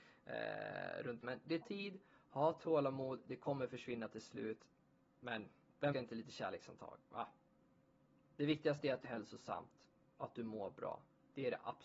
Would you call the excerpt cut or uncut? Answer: cut